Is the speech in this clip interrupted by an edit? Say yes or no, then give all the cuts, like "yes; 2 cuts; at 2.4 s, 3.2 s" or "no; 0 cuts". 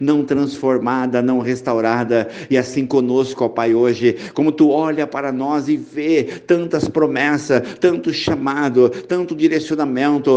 no; 0 cuts